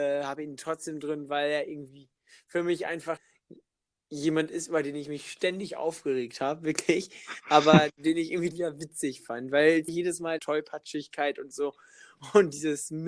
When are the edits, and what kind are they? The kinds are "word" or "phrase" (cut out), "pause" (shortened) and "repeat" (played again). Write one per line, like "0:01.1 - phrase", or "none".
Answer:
0:03.2 - word
0:08.5 - phrase
0:09.9 - word
0:10.4 - phrase